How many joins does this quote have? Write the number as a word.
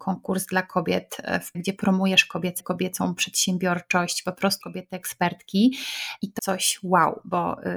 four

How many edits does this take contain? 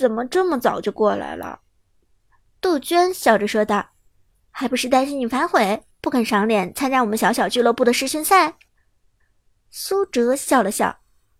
four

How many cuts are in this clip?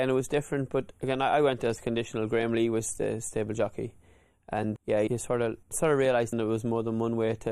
four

